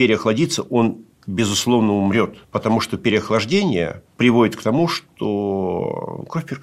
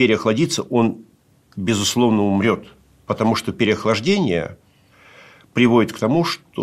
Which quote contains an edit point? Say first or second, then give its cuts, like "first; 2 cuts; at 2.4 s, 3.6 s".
first; 3 cuts; at 1.1 s, 2.4 s, 4.1 s